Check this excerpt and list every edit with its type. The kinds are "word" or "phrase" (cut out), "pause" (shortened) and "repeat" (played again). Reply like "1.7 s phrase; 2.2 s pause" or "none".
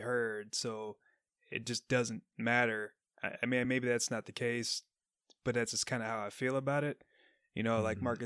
none